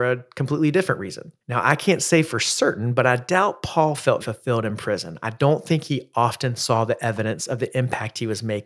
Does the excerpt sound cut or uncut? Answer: cut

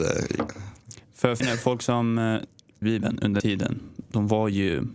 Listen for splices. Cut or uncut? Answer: cut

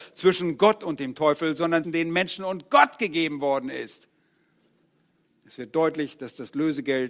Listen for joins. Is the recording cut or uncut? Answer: cut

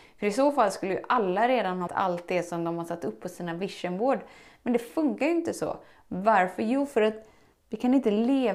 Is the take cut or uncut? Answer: cut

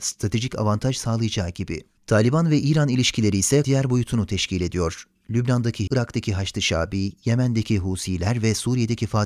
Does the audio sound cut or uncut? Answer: cut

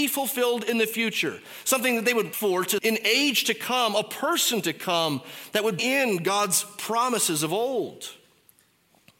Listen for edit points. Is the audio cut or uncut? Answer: cut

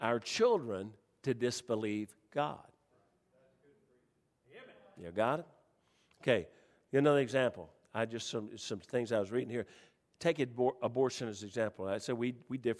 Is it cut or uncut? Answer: uncut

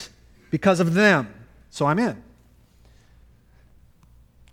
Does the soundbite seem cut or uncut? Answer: uncut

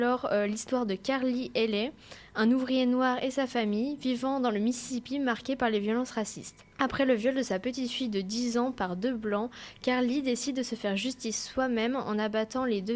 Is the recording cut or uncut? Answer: cut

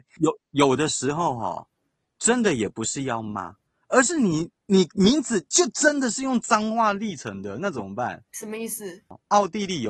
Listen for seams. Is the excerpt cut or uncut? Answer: uncut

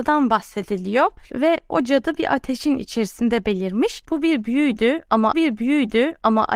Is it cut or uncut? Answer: cut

